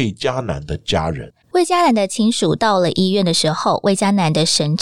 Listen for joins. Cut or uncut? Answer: cut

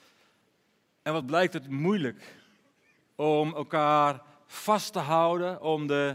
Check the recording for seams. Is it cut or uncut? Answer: uncut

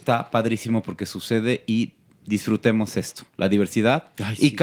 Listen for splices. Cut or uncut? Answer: uncut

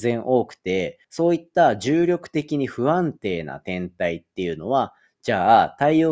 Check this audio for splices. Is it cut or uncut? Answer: cut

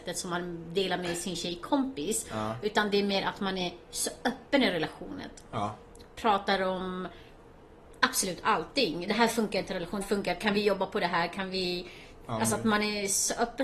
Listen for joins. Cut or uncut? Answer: cut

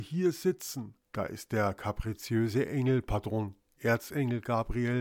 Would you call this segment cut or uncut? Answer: cut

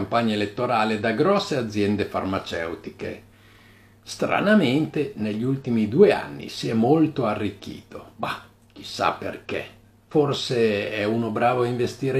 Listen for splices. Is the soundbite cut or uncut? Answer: uncut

